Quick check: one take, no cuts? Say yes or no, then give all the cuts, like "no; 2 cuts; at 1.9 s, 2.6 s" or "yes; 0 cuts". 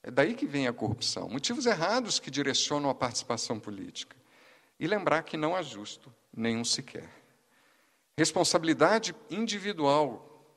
yes; 0 cuts